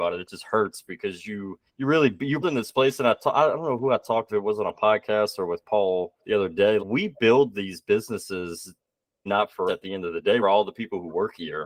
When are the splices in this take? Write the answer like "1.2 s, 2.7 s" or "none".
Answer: 1.7 s, 2.4 s, 4.3 s, 6.2 s, 6.8 s, 9.3 s, 9.7 s, 10.4 s